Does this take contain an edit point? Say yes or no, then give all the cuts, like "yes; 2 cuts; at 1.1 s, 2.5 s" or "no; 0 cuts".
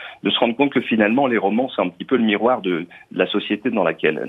no; 0 cuts